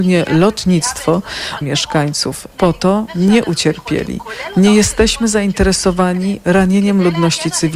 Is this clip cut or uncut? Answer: cut